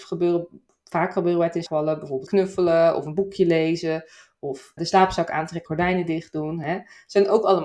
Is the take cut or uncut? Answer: cut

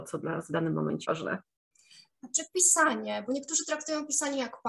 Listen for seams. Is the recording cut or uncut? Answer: cut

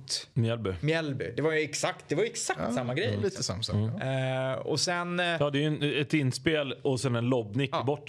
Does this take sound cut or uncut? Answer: uncut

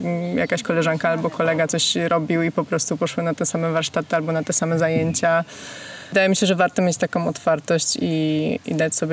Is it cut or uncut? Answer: uncut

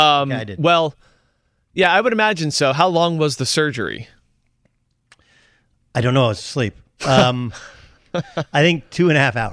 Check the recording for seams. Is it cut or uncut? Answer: uncut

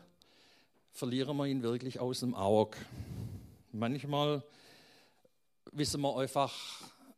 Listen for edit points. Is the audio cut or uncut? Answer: uncut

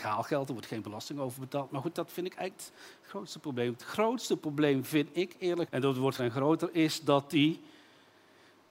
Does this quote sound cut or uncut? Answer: cut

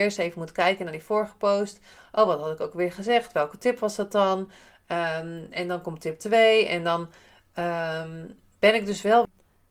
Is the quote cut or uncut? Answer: uncut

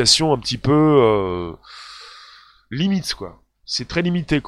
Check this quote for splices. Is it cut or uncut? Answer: uncut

